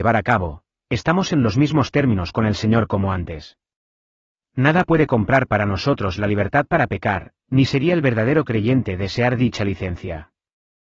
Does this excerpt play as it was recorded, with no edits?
yes; 0 cuts

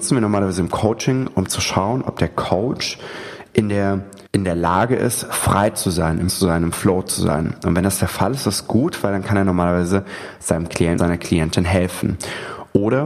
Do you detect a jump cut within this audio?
yes; 3 cuts; at 4.3 s, 6.3 s, 11.0 s

